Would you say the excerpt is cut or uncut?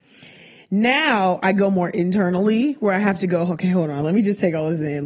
uncut